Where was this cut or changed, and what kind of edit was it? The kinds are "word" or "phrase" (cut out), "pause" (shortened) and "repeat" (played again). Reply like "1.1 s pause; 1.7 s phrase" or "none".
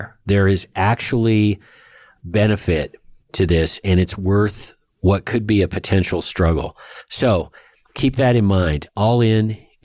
none